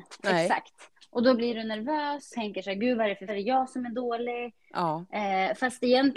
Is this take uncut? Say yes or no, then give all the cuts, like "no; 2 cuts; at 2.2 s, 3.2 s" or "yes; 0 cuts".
no; 2 cuts; at 2.3 s, 3.3 s